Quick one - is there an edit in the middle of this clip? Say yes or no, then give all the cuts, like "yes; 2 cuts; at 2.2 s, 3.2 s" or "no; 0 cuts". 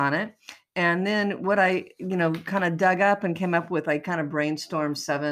no; 0 cuts